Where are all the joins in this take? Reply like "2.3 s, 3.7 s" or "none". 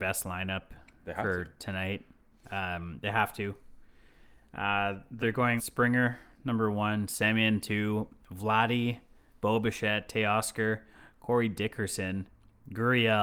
5.2 s, 5.6 s